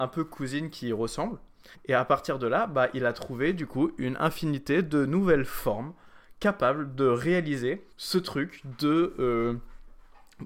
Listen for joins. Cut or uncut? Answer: cut